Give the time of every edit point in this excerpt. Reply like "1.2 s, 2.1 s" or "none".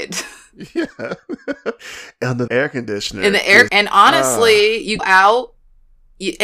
2.5 s, 3.7 s, 5.0 s